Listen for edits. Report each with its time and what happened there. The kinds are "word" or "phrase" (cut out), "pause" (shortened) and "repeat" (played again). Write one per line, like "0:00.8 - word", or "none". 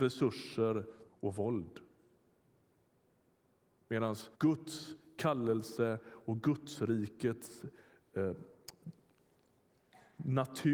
0:01.1 - word
0:04.3 - pause